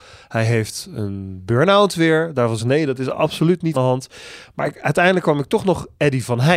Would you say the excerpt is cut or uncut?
cut